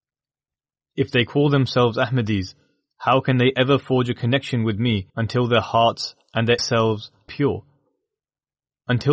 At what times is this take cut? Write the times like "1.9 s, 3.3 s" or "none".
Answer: 5.1 s, 6.6 s, 7.3 s